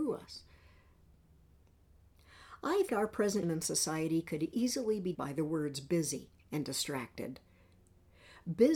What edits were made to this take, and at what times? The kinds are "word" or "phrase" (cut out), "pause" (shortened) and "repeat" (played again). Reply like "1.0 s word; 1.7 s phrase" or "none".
2.9 s word; 3.4 s word; 5.1 s word